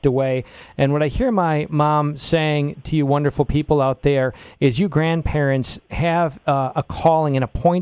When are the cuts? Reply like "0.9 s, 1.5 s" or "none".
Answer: none